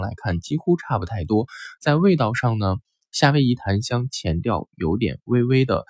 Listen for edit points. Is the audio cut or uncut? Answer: uncut